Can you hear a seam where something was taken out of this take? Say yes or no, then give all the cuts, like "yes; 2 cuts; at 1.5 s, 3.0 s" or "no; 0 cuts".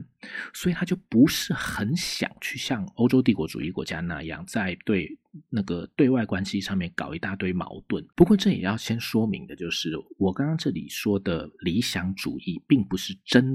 yes; 1 cut; at 8.1 s